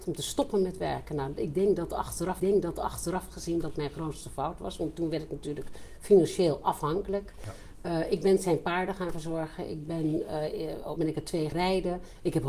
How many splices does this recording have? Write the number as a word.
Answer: three